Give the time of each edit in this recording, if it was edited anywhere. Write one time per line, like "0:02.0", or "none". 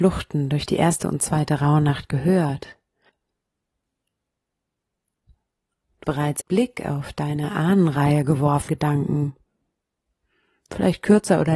0:06.0
0:06.4
0:08.7